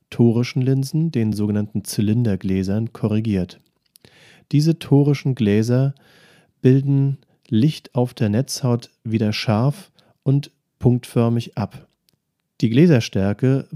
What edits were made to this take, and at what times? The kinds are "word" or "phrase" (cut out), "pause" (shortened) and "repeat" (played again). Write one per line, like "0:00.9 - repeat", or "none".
none